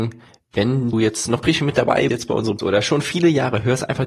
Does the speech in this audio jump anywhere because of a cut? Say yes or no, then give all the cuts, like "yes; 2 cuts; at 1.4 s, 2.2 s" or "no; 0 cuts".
yes; 4 cuts; at 0.9 s, 1.4 s, 2.1 s, 2.6 s